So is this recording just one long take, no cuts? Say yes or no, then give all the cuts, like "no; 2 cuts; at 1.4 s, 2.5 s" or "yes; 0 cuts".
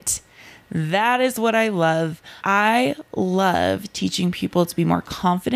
no; 1 cut; at 2.4 s